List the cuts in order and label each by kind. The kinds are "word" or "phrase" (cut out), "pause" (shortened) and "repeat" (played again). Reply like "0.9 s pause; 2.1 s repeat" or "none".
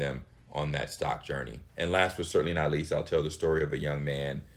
1.7 s pause